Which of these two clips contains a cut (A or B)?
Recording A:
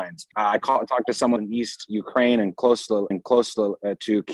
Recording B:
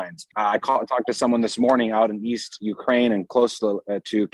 A